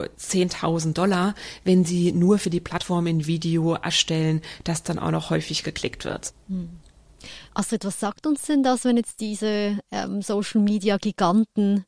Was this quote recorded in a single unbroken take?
no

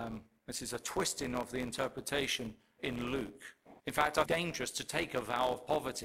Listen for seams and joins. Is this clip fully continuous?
no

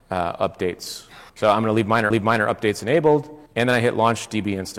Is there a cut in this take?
yes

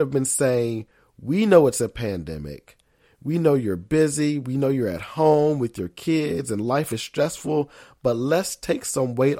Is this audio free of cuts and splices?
yes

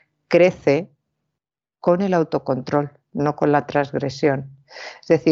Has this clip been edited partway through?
no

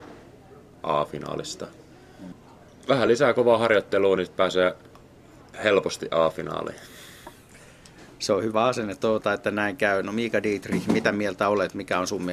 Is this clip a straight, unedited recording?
yes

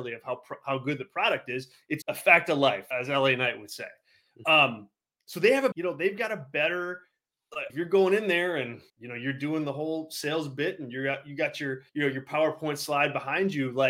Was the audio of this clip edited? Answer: yes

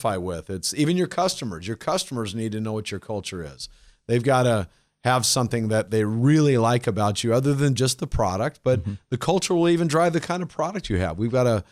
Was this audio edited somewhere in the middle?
no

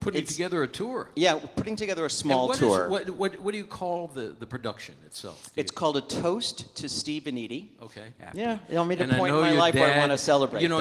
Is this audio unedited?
yes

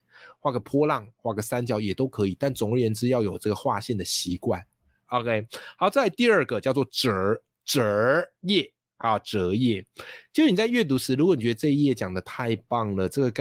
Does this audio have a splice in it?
no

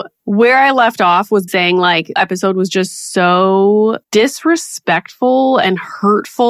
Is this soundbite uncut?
no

